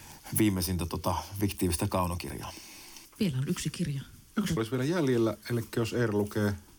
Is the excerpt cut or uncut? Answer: cut